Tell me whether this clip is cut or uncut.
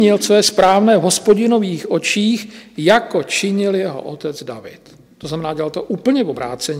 uncut